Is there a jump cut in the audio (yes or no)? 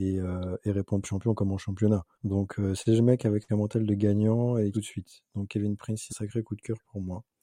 yes